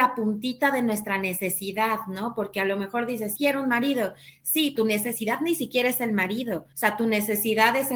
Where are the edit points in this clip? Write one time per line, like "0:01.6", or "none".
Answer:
0:03.3
0:04.8
0:06.7